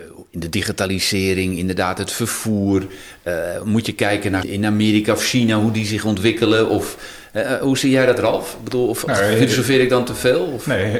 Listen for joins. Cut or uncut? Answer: cut